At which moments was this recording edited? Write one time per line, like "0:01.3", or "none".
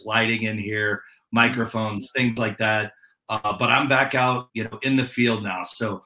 0:04.5